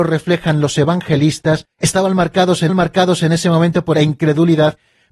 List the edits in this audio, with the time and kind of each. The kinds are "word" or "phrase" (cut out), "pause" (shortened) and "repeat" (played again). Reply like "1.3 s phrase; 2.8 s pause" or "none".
1.7 s pause; 2.7 s repeat; 3.9 s phrase